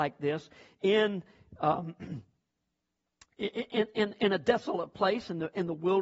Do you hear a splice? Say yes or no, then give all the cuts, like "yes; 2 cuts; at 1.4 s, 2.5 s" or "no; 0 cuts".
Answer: no; 0 cuts